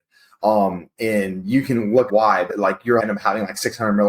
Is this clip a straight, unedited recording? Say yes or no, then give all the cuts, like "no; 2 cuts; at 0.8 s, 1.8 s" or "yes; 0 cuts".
no; 3 cuts; at 2.1 s, 2.5 s, 3.0 s